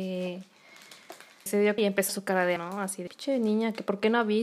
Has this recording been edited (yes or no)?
yes